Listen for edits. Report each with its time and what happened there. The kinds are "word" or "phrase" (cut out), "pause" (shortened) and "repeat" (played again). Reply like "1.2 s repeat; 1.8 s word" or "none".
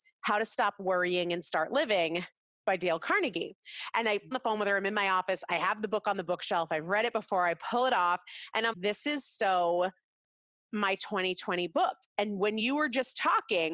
4.3 s phrase; 8.7 s word